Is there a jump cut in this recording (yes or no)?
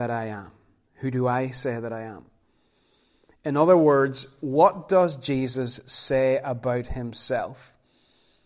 no